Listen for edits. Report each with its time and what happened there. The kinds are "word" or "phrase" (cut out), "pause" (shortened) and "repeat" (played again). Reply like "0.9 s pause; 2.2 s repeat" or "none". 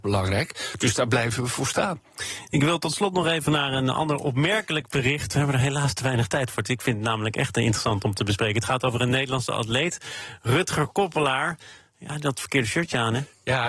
none